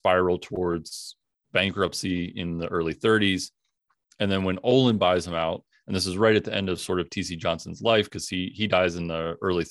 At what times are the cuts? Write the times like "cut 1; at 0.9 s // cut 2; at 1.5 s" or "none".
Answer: none